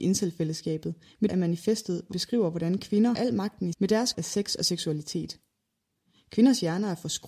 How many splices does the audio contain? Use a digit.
5